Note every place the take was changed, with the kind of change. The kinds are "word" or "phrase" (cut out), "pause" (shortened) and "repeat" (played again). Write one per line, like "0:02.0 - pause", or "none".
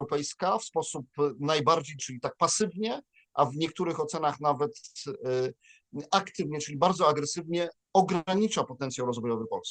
0:02.0 - word